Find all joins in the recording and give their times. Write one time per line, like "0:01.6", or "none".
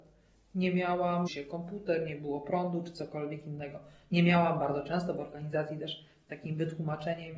0:01.3